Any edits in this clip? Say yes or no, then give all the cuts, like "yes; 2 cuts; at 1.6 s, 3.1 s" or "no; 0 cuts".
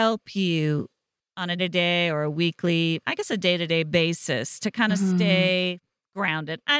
yes; 1 cut; at 1.6 s